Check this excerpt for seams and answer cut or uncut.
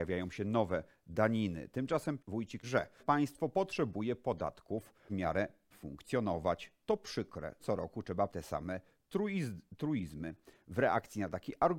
cut